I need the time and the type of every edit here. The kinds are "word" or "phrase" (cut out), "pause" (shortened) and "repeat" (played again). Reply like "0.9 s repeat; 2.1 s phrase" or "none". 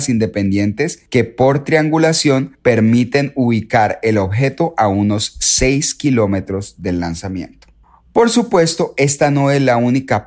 none